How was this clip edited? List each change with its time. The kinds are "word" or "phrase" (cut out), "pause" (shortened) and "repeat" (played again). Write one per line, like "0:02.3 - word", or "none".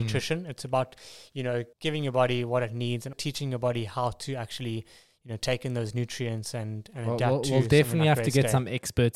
0:01.7 - pause
0:03.1 - word